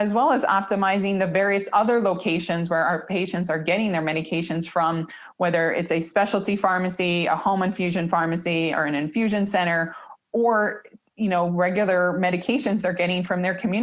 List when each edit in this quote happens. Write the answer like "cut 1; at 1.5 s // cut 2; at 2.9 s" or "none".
none